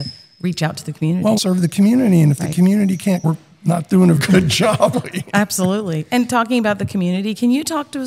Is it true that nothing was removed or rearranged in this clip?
no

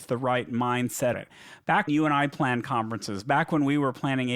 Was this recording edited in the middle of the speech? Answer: yes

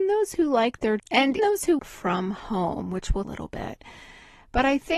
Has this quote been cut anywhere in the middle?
yes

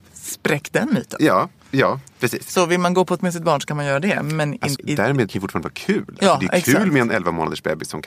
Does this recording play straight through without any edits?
no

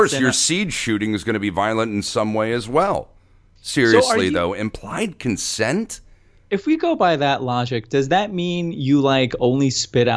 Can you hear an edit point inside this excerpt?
no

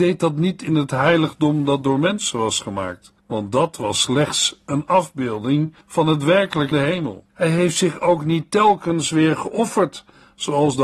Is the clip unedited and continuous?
no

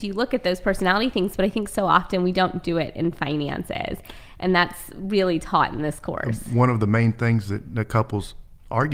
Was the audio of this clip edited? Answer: no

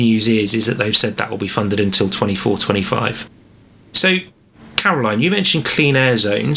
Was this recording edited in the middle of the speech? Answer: no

